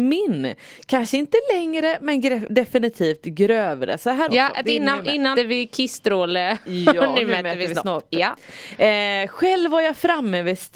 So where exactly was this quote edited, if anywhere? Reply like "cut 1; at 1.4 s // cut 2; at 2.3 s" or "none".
cut 1; at 4.3 s // cut 2; at 5.4 s